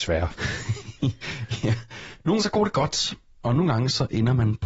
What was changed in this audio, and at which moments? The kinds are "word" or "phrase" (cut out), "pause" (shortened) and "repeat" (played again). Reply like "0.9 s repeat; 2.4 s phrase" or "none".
2.4 s word